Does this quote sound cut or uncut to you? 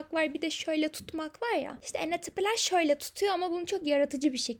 uncut